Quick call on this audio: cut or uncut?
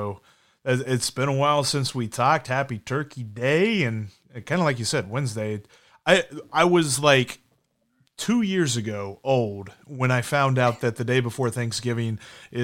uncut